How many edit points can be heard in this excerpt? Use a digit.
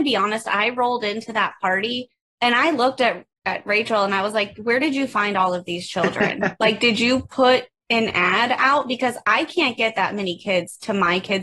0